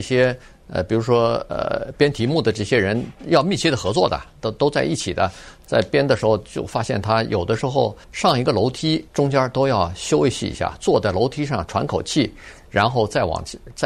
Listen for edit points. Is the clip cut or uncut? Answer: cut